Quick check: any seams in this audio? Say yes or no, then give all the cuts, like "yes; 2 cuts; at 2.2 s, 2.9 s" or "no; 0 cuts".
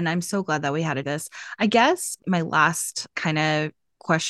yes; 2 cuts; at 1.0 s, 3.1 s